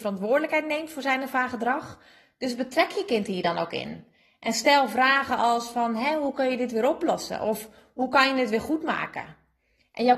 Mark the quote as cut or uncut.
uncut